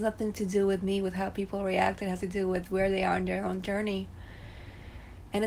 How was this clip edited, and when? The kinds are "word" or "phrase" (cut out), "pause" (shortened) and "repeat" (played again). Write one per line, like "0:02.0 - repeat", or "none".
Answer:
0:02.2 - word